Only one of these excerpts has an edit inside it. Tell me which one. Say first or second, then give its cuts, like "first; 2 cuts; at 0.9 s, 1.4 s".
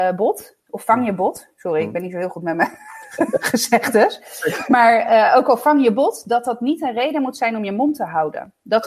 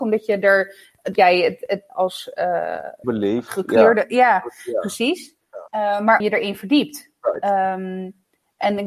second; 5 cuts; at 1.2 s, 1.9 s, 3.0 s, 5.7 s, 6.2 s